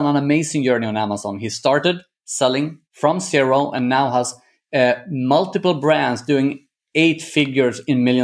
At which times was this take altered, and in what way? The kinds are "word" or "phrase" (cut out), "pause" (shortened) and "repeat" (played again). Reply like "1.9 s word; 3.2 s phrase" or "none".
2.8 s pause